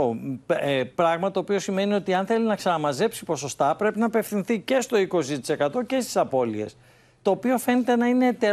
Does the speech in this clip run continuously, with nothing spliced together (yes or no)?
yes